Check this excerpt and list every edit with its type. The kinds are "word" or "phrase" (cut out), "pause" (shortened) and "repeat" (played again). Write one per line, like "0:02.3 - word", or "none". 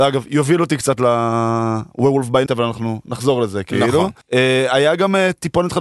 0:02.5 - word
0:04.2 - pause